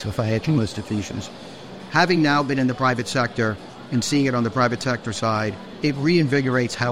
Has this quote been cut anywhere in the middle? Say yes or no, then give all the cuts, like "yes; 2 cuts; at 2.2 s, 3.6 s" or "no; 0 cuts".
no; 0 cuts